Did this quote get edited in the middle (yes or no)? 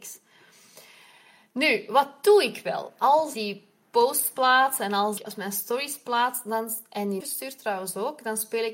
yes